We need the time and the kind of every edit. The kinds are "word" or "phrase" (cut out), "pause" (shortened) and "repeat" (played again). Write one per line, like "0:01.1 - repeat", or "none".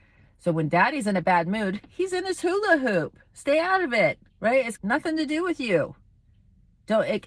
0:04.3 - pause
0:04.8 - word